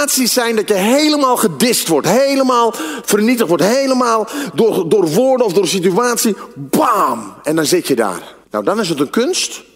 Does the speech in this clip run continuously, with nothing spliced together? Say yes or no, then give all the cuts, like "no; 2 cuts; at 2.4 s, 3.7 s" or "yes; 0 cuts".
no; 1 cut; at 8.4 s